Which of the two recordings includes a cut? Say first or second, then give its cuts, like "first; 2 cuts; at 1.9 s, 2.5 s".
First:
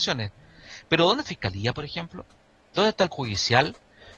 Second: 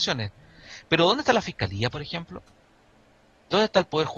first; 3 cuts; at 1.3 s, 2.4 s, 3.1 s